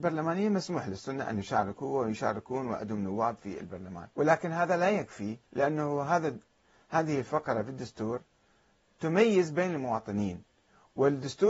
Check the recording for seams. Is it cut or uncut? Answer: cut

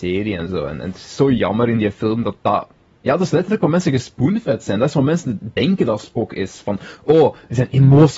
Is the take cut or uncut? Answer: uncut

